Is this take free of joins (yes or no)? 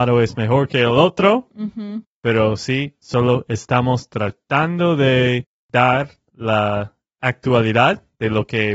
yes